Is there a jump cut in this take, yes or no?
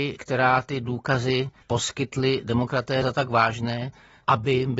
yes